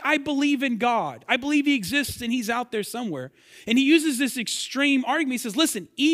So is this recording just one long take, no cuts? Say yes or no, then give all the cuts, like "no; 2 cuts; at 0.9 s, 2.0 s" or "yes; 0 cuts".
yes; 0 cuts